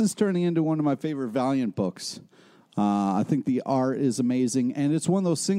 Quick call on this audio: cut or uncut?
uncut